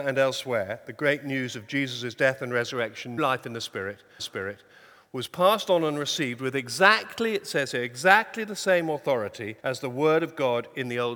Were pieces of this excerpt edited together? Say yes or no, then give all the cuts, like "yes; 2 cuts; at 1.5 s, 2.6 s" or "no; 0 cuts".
yes; 3 cuts; at 3.2 s, 4.2 s, 9.6 s